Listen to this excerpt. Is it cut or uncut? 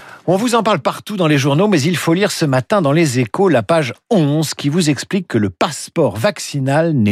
uncut